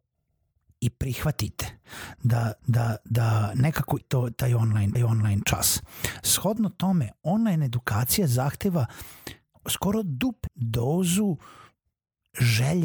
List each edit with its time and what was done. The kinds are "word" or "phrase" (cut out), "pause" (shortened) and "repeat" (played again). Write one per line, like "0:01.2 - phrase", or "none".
0:02.6 - repeat
0:04.0 - word
0:04.9 - repeat
0:10.5 - word

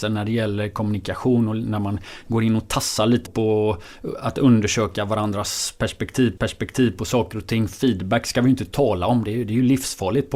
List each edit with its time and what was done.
0:03.3 - word
0:06.4 - repeat

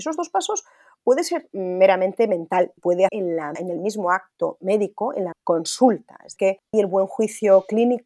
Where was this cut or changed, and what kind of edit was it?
0:01.5 - word
0:02.8 - word
0:03.1 - word
0:03.6 - word
0:05.3 - word
0:06.4 - word
0:06.7 - word

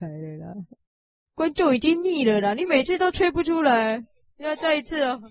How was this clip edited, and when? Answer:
none

